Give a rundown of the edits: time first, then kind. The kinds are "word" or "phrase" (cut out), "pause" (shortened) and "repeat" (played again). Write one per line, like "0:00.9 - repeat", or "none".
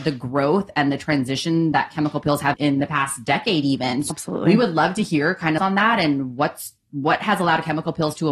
0:02.5 - word
0:04.1 - word
0:05.6 - phrase

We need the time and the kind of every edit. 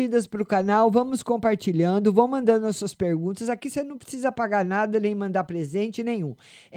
none

